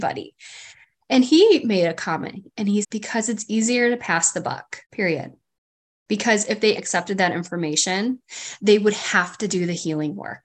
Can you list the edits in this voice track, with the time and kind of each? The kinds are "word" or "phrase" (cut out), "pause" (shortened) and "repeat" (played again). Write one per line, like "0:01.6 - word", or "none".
0:02.8 - word
0:04.8 - pause
0:06.8 - word